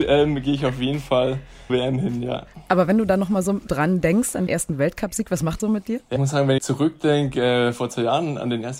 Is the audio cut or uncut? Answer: cut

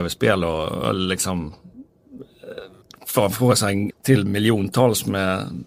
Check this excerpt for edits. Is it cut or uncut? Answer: cut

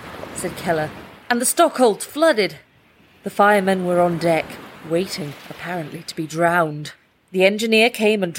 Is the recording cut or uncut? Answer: uncut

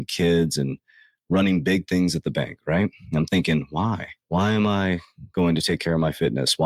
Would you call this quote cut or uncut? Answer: cut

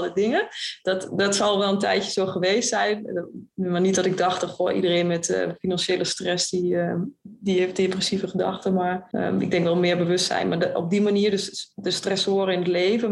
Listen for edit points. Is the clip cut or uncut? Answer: uncut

